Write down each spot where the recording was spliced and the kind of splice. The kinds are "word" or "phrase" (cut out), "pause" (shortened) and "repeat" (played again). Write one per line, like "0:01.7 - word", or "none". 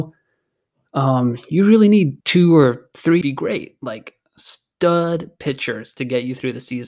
0:02.2 - pause
0:03.2 - phrase